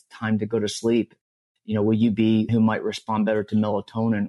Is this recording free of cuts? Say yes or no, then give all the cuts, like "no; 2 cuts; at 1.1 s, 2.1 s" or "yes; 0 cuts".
no; 1 cut; at 2.5 s